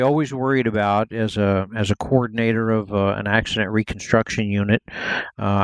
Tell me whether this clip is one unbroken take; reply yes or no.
yes